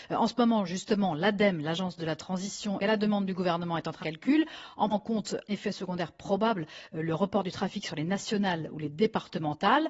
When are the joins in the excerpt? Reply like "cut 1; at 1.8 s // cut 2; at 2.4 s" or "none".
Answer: cut 1; at 2.8 s // cut 2; at 4.0 s // cut 3; at 4.9 s // cut 4; at 5.5 s